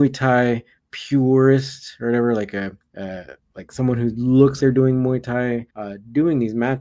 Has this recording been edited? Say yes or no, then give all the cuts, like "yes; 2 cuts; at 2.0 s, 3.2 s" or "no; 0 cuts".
yes; 3 cuts; at 2.8 s, 4.6 s, 5.7 s